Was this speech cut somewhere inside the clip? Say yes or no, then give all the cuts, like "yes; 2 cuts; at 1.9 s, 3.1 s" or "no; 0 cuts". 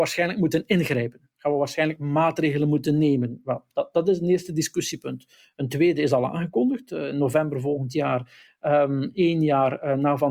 no; 0 cuts